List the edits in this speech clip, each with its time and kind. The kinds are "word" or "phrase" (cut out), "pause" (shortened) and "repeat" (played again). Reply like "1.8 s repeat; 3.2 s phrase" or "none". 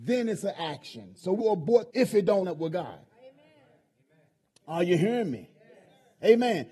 1.4 s phrase; 1.9 s phrase; 2.4 s word